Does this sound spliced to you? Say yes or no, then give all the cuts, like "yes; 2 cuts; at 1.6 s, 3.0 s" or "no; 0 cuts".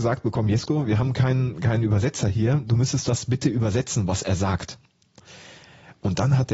no; 0 cuts